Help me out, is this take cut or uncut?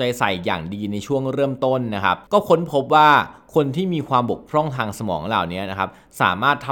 cut